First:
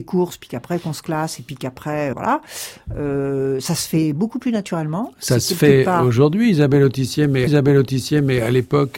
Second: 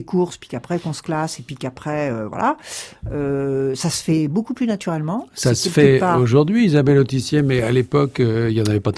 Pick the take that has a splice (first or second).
first